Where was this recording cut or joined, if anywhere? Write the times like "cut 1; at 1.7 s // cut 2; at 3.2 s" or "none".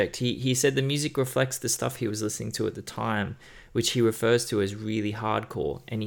none